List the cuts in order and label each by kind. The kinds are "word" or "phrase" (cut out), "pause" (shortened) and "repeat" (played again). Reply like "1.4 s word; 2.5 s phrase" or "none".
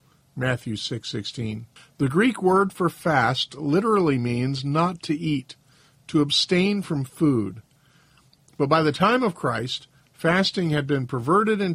none